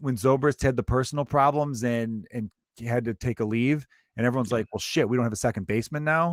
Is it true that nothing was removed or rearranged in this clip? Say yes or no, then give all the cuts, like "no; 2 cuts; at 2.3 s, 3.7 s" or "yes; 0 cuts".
yes; 0 cuts